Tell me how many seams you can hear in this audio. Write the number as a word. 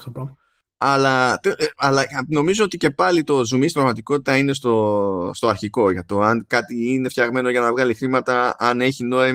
zero